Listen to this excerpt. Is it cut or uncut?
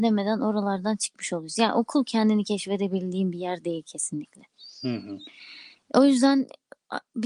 uncut